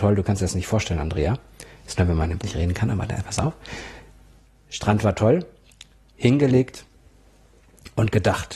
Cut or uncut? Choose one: cut